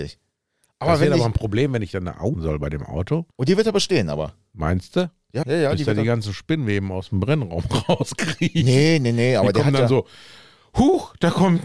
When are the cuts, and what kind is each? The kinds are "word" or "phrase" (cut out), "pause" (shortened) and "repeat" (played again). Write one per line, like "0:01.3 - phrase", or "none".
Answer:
0:02.3 - word
0:03.3 - pause
0:05.4 - word